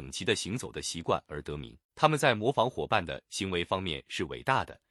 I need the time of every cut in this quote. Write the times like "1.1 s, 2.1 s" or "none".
1.8 s